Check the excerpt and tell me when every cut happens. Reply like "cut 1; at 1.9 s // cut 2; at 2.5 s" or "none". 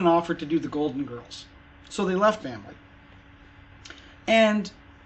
cut 1; at 2.4 s